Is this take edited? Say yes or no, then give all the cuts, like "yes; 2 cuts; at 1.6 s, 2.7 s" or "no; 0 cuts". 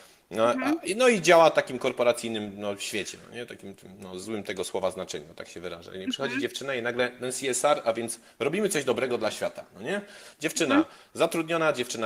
no; 0 cuts